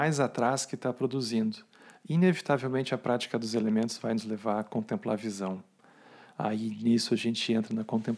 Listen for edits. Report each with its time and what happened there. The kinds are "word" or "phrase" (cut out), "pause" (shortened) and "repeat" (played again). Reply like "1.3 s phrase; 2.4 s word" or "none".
none